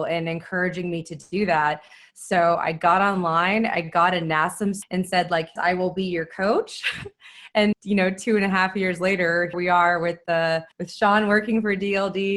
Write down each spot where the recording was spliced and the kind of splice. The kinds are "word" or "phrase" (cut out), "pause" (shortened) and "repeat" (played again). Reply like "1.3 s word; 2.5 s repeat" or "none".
4.8 s word; 5.6 s word; 7.7 s word; 9.5 s word; 10.7 s pause

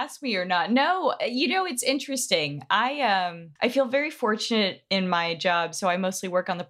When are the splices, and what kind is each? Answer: 3.6 s pause

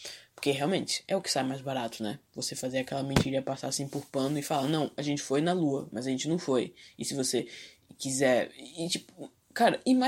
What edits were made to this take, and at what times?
none

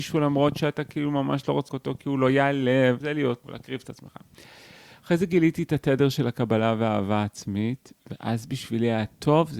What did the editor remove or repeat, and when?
1.7 s word; 3.0 s word; 3.4 s word

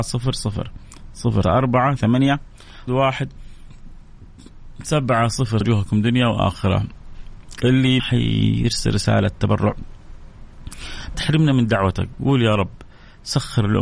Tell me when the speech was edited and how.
1.4 s word; 2.0 s word; 2.9 s word; 5.6 s phrase; 8.0 s word; 11.1 s phrase

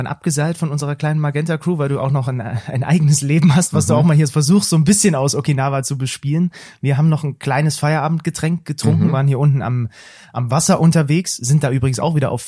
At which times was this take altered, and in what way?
none

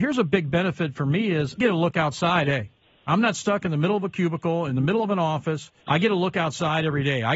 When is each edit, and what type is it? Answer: 1.6 s word; 2.4 s word; 5.8 s pause

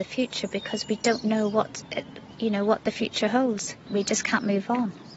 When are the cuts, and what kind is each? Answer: 3.8 s pause

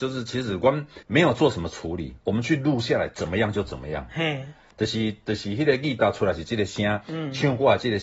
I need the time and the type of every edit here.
1.0 s pause

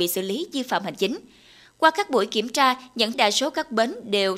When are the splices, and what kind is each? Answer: 3.1 s word

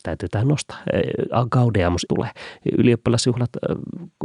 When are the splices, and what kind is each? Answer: 2.1 s word

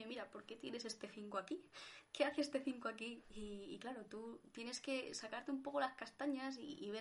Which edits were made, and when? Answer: none

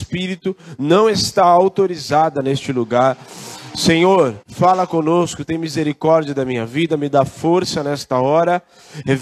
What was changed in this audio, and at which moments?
4.4 s pause

